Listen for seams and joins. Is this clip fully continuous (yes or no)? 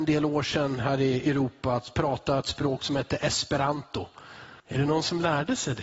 no